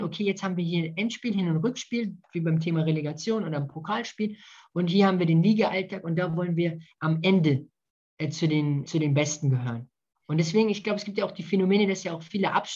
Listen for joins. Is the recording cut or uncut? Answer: cut